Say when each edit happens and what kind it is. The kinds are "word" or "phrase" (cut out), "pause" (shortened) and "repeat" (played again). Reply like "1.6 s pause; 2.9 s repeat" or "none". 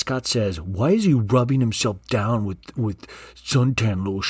none